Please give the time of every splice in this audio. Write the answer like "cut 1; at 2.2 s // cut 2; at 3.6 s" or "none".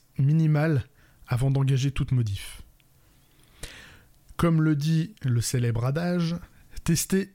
none